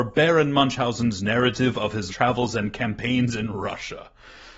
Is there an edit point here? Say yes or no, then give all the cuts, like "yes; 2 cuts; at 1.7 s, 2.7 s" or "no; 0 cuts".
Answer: yes; 1 cut; at 2.1 s